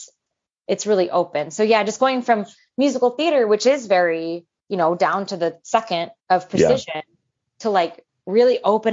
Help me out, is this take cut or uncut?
cut